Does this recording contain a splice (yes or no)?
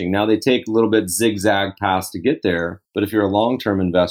yes